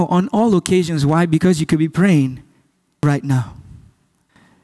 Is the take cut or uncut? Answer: uncut